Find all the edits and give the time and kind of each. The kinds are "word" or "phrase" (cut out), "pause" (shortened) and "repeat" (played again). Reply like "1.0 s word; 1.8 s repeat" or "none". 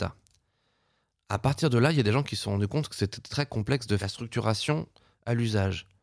4.0 s phrase